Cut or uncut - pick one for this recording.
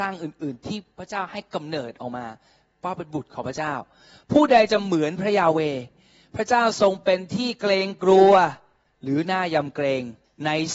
uncut